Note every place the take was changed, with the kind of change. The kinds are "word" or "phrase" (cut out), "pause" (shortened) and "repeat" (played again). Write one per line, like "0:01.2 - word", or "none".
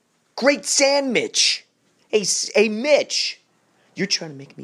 none